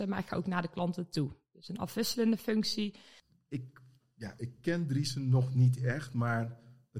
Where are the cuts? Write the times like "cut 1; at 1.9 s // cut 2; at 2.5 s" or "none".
none